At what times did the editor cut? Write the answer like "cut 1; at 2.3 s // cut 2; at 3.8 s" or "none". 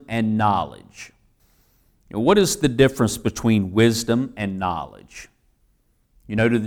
none